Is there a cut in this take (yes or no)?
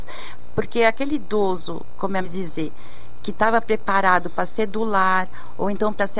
yes